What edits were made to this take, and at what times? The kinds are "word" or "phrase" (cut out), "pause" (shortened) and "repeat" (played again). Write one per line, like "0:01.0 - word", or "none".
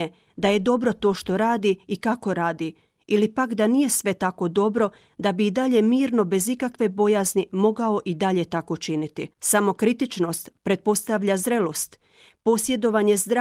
0:09.3 - pause